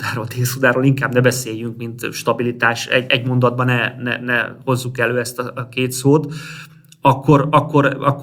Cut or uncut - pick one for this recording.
uncut